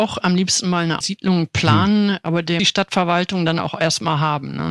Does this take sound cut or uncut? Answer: cut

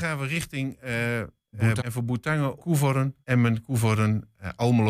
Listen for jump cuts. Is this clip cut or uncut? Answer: cut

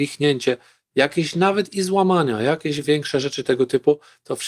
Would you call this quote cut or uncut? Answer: uncut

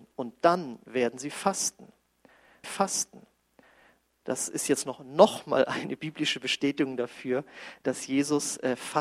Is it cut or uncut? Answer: cut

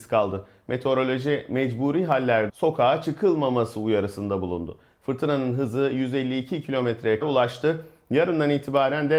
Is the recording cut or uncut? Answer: cut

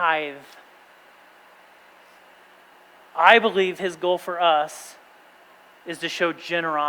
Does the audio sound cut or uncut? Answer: uncut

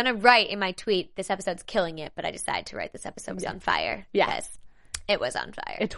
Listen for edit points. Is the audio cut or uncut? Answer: uncut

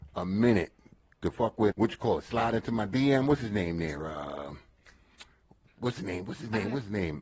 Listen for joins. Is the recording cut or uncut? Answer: cut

